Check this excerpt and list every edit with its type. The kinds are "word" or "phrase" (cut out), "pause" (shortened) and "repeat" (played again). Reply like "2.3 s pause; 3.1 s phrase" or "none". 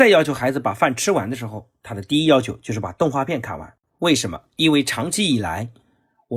none